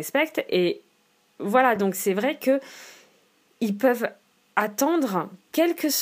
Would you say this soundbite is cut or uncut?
uncut